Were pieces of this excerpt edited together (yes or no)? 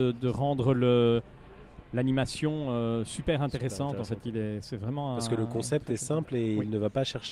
no